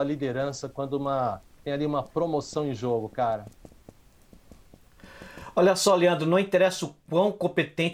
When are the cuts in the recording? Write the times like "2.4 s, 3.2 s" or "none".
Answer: none